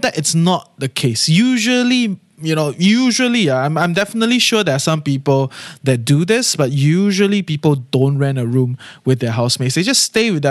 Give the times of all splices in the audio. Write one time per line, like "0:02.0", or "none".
none